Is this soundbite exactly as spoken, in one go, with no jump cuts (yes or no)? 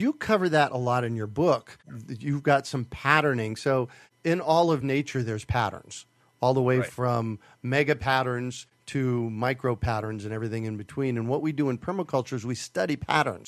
yes